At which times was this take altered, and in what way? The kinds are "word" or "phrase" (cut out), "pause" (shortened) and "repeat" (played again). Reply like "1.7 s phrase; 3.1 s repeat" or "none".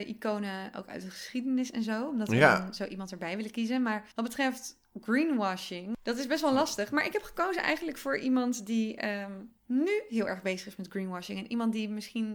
4.1 s pause